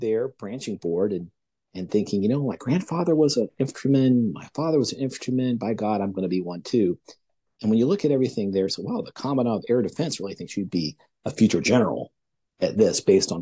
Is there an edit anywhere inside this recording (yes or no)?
no